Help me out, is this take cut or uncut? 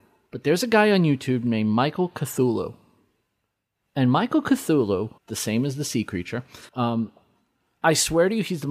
cut